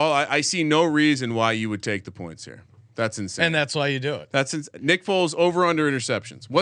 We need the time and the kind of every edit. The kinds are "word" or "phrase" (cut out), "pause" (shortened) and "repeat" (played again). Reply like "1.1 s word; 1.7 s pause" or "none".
none